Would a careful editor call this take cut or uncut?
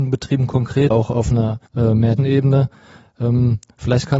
cut